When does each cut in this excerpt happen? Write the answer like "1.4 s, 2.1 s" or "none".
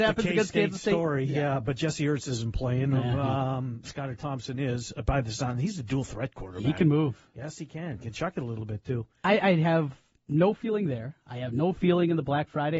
none